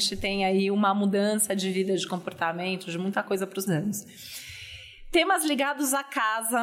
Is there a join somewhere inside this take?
yes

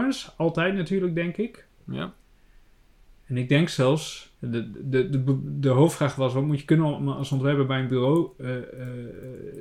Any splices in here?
yes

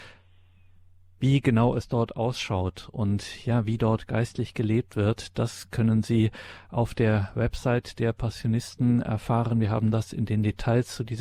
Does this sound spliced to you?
no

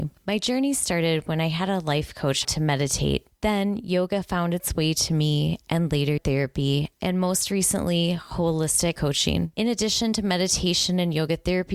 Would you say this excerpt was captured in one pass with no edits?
no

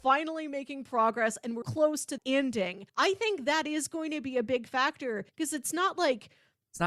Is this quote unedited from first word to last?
no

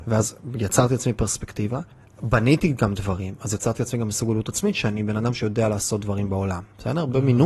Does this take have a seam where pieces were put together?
yes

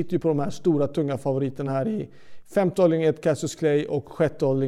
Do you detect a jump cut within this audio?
no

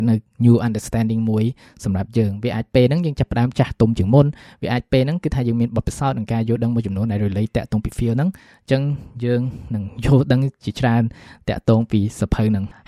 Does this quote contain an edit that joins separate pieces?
no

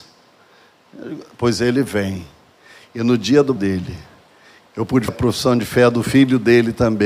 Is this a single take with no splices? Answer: no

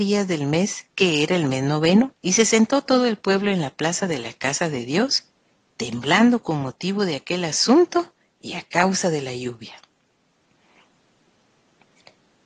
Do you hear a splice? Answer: yes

